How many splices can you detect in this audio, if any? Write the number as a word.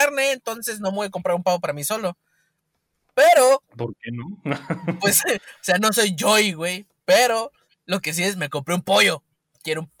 zero